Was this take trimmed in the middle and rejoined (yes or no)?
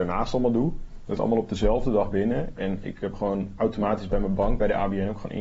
yes